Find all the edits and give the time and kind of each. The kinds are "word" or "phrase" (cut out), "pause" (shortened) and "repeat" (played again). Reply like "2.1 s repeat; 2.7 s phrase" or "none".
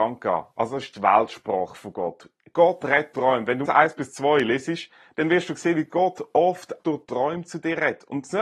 3.1 s word; 3.7 s word; 6.8 s word